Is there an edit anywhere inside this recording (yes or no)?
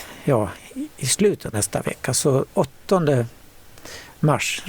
yes